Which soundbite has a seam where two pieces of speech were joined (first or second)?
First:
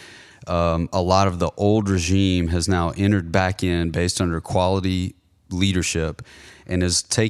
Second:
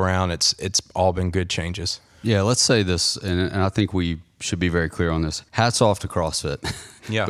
second